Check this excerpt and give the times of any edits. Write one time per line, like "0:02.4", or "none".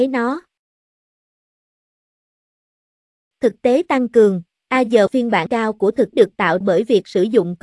0:05.1
0:05.5
0:06.1
0:06.6